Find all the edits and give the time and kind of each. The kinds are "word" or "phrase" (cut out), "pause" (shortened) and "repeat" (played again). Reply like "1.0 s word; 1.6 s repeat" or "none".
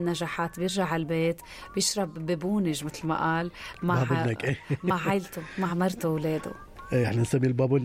none